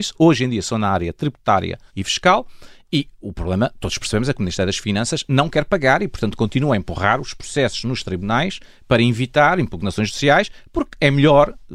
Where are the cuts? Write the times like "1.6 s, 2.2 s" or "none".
1.9 s